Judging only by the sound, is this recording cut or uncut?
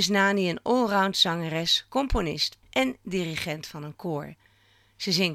cut